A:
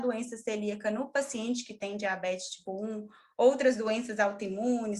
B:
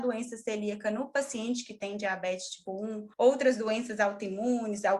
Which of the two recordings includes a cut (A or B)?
B